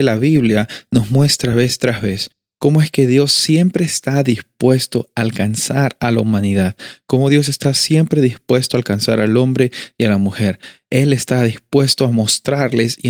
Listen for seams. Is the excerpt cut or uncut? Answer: uncut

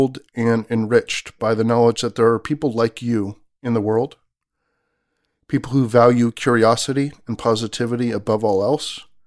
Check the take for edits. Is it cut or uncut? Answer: uncut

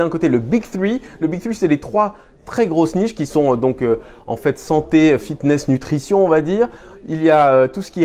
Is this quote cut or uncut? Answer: uncut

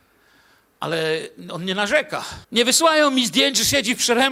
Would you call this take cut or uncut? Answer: cut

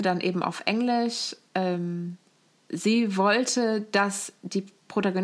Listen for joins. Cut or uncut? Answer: uncut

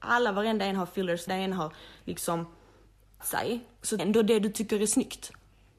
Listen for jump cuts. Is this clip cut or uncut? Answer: cut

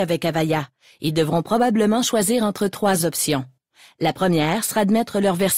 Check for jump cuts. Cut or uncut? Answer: uncut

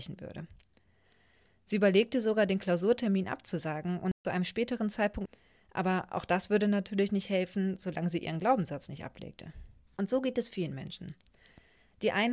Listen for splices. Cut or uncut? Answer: cut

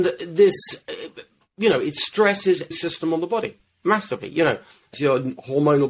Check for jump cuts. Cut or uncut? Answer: cut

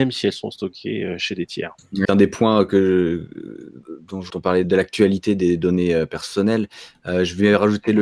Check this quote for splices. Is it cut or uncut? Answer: cut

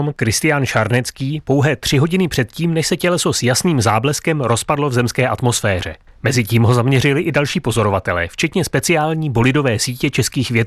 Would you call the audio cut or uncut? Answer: uncut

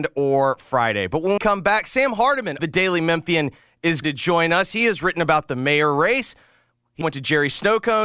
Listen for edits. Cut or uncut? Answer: cut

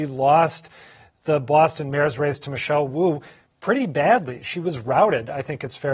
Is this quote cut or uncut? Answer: uncut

